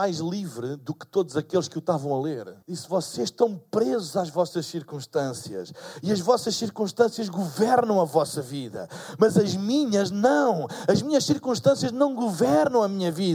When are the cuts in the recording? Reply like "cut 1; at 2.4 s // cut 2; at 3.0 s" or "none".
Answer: cut 1; at 2.6 s